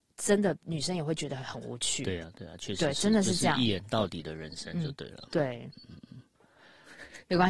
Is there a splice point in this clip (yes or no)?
no